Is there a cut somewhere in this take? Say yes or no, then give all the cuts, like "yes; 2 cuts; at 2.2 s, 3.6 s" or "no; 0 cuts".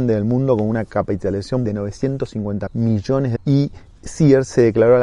yes; 3 cuts; at 1.6 s, 2.7 s, 3.4 s